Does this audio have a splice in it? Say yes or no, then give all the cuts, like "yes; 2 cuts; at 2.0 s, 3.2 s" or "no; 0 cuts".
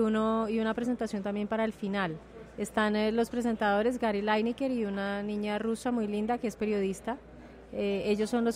no; 0 cuts